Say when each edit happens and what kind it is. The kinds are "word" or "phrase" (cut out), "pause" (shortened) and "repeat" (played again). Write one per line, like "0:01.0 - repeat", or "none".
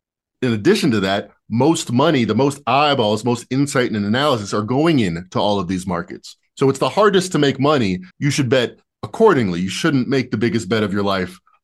0:08.1 - pause